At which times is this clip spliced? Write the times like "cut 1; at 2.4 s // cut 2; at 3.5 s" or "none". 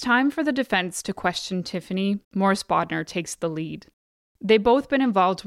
cut 1; at 2.2 s